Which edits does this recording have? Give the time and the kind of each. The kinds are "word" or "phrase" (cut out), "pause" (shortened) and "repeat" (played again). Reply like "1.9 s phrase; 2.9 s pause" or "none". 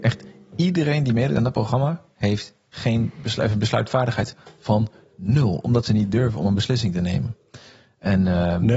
none